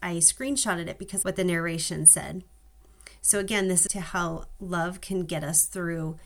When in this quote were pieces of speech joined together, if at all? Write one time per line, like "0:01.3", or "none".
0:01.2
0:03.9

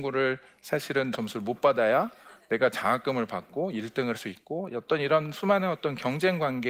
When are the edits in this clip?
0:01.1
0:04.1

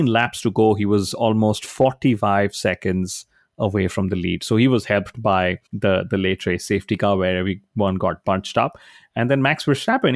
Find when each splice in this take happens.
0:05.7

